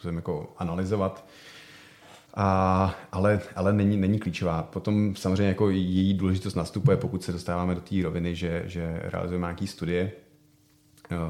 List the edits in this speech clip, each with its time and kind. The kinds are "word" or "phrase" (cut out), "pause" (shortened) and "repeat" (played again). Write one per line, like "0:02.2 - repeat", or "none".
0:02.3 - pause

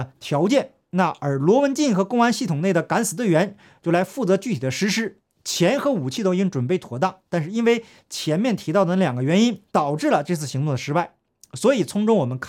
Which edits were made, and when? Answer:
0:09.7 - pause

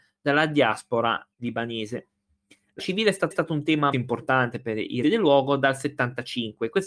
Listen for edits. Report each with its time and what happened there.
0:01.3 - pause
0:02.8 - word
0:03.3 - repeat
0:03.9 - word
0:05.0 - word

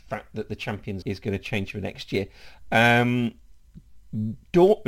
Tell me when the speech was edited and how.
0:01.0 - phrase

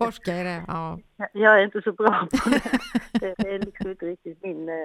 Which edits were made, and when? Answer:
0:03.3 - word

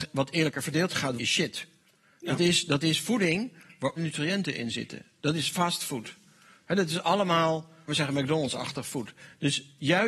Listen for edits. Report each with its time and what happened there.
0:01.2 - word
0:04.0 - word
0:07.9 - word

